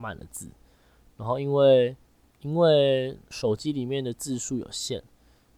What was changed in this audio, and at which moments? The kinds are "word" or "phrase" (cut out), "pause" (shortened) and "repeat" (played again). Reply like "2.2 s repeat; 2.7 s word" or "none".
2.2 s pause; 3.2 s pause